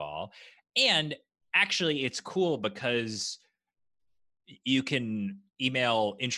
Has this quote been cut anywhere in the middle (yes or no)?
no